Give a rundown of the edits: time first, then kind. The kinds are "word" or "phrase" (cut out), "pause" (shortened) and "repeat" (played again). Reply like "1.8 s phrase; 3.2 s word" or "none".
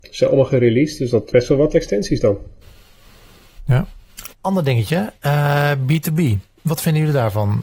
1.3 s word; 4.3 s pause

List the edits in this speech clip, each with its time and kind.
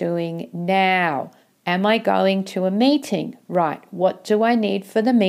1.4 s pause

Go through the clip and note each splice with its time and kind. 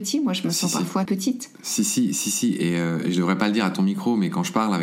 1.0 s phrase

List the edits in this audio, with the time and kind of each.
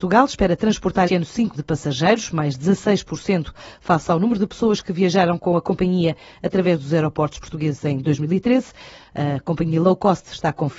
1.1 s word; 1.5 s word

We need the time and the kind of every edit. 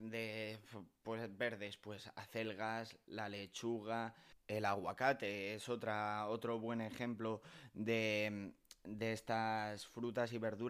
4.4 s pause

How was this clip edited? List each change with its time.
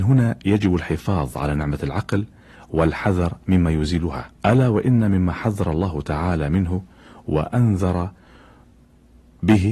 4.4 s pause

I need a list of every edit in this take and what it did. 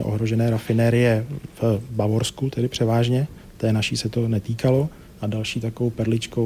none

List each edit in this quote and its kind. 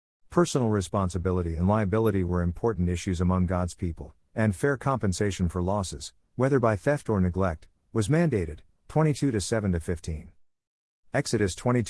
none

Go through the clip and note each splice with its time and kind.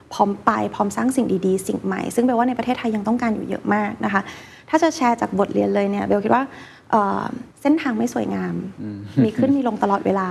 7.5 s pause

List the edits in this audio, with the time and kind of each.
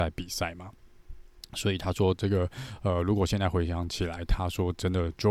none

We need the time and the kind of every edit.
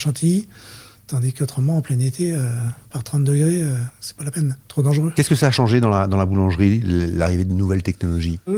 0.9 s pause; 4.6 s pause

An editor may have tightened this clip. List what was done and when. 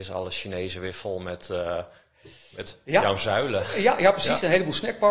none

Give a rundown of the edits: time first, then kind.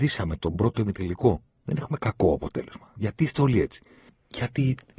1.5 s pause

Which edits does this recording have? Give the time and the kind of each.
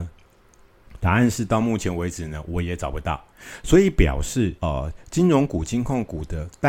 4.6 s pause

